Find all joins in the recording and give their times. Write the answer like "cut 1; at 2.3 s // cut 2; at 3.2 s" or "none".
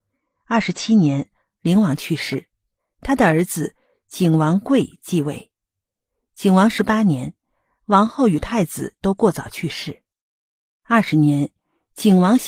none